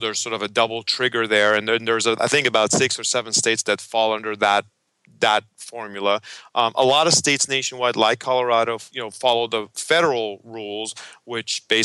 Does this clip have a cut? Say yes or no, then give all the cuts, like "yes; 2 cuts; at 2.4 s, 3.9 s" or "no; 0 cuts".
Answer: no; 0 cuts